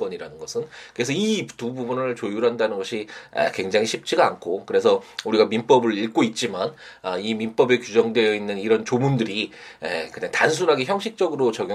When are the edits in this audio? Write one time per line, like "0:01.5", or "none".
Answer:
none